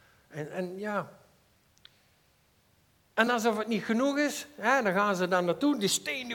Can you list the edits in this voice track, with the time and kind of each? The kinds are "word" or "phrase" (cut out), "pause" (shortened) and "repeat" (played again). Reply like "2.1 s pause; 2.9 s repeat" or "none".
none